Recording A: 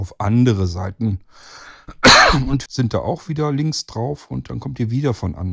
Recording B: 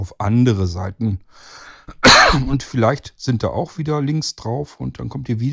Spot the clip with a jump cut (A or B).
A